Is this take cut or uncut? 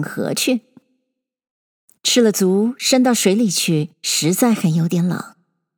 cut